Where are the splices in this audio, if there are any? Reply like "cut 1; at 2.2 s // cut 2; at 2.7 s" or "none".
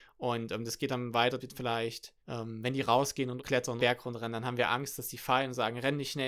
cut 1; at 1.4 s // cut 2; at 2.2 s // cut 3; at 3.4 s // cut 4; at 3.8 s